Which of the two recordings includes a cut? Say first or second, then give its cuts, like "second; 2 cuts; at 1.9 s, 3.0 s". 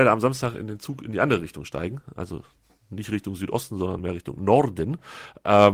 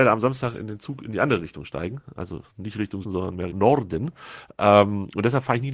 second; 3 cuts; at 2.5 s, 3.0 s, 3.5 s